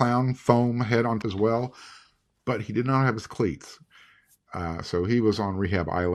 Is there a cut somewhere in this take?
yes; 1 cut; at 1.2 s

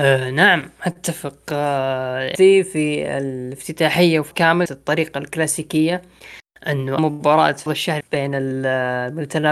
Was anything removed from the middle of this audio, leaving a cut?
yes; 6 cuts; at 2.3 s, 4.3 s, 4.7 s, 7.0 s, 7.7 s, 8.0 s

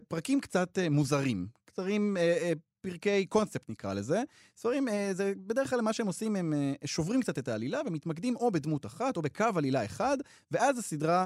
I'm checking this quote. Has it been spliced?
no; 0 cuts

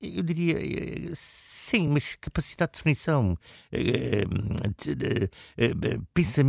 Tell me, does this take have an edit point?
no; 0 cuts

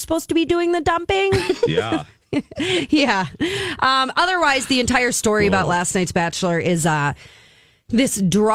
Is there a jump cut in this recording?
no; 0 cuts

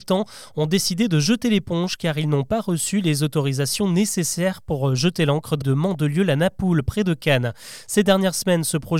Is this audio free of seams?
no; 1 cut; at 5.6 s

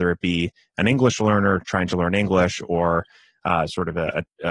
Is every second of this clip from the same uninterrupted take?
yes; 0 cuts

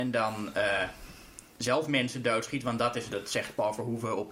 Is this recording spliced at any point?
yes; 1 cut; at 3.1 s

